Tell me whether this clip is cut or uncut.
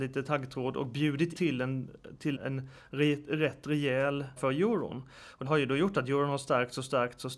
cut